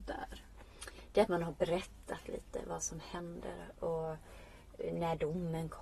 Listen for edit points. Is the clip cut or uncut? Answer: uncut